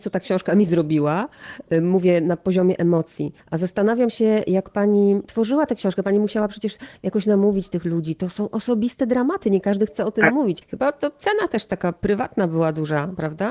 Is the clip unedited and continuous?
no; 2 cuts; at 3.4 s, 10.6 s

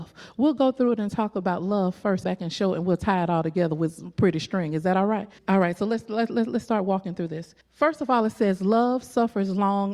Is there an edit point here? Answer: yes; 3 cuts; at 2.2 s, 5.4 s, 7.6 s

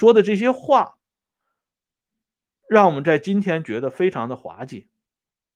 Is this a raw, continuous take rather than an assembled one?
yes; 0 cuts

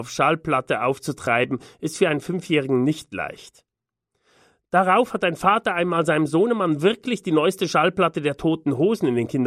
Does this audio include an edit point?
no; 0 cuts

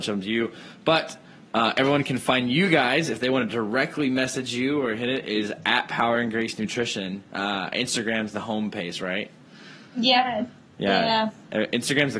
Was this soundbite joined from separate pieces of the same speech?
no; 0 cuts

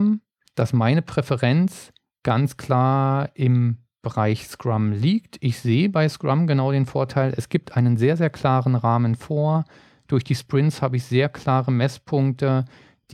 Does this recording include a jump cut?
no; 0 cuts

